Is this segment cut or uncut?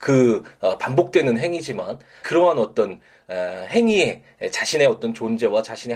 cut